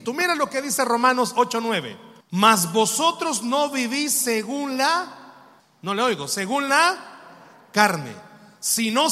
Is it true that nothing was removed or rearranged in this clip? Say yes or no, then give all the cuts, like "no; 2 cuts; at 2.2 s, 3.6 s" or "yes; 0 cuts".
no; 2 cuts; at 2.2 s, 5.6 s